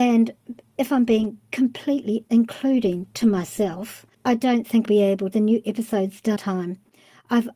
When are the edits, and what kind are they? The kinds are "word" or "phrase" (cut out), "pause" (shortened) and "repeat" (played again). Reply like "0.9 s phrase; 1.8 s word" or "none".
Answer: 2.2 s word; 4.1 s pause; 4.8 s word; 5.3 s word; 6.4 s word